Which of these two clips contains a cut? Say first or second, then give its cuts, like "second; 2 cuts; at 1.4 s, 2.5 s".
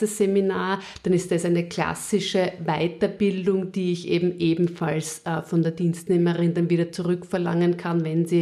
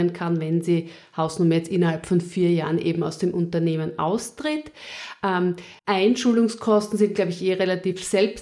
second; 1 cut; at 5.8 s